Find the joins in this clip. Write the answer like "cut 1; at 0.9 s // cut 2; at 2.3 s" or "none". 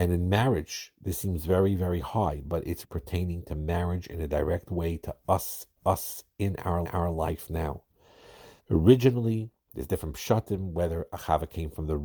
cut 1; at 2.8 s // cut 2; at 5.8 s // cut 3; at 6.8 s // cut 4; at 8.6 s